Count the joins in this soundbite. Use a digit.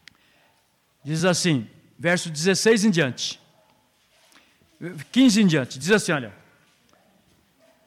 0